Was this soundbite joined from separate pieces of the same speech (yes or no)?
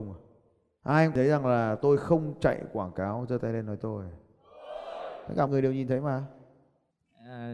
yes